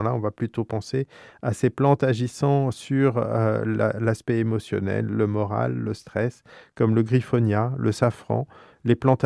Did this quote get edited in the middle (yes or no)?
no